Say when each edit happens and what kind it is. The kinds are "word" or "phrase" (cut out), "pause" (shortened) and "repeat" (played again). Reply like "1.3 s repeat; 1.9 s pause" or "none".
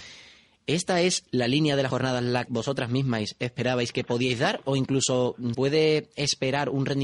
1.9 s word; 2.5 s word; 5.5 s word